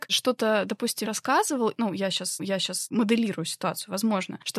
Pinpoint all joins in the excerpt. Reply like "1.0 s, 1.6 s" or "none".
1.0 s, 2.4 s

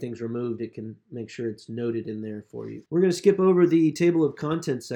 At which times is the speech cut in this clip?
2.9 s

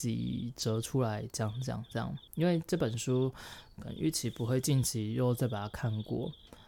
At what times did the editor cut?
2.3 s

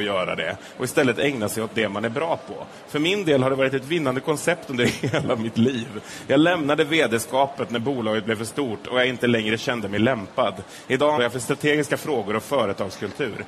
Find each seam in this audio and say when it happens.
11.2 s

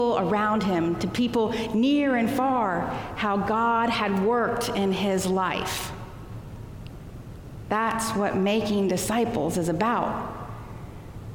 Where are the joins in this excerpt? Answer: none

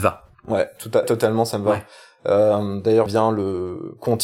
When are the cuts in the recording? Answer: 1.0 s, 3.1 s

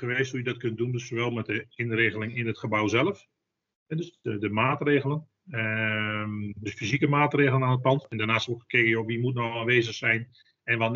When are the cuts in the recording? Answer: none

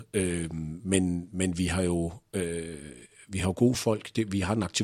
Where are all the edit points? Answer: none

